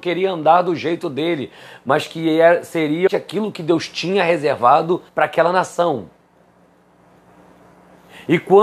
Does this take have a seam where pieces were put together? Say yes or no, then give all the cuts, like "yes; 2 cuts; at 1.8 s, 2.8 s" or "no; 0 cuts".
yes; 2 cuts; at 3.1 s, 5.1 s